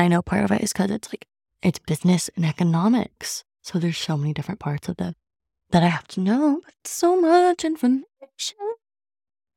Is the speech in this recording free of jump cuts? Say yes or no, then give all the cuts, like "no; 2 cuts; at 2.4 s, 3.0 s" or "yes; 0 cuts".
no; 1 cut; at 1.5 s